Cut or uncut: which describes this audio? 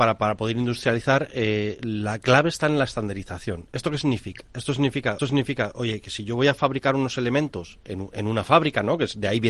cut